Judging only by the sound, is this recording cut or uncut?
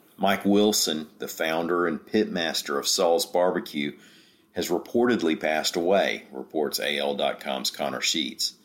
uncut